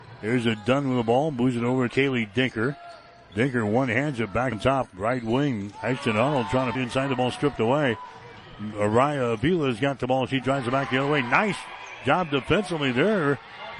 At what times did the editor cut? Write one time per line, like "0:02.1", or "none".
0:01.9
0:04.5
0:06.7